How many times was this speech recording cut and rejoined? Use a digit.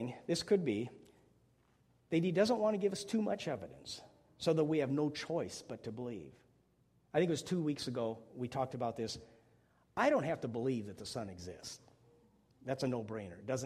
0